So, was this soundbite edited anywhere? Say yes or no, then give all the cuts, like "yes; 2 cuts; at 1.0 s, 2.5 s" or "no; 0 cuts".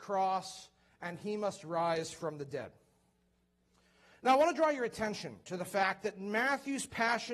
no; 0 cuts